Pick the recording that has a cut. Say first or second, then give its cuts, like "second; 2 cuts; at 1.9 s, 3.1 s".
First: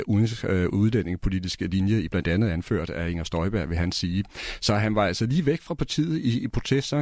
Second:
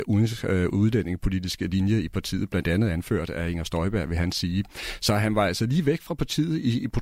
first; 1 cut; at 2.1 s